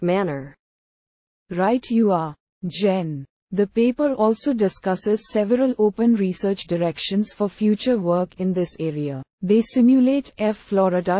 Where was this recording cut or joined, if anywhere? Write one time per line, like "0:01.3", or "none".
0:09.3